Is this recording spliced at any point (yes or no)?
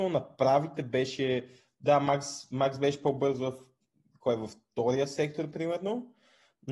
no